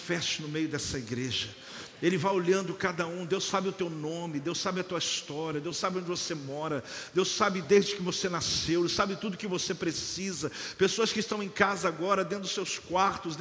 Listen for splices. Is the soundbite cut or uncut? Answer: uncut